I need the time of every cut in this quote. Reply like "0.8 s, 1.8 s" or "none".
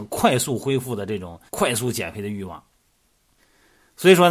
1.5 s